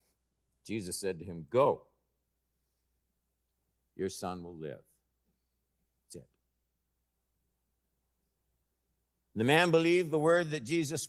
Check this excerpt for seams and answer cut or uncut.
uncut